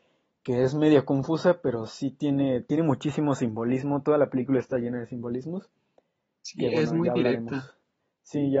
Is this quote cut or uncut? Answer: uncut